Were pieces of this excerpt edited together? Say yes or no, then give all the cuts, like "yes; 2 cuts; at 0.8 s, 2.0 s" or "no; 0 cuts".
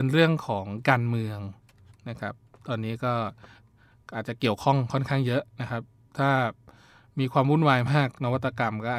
no; 0 cuts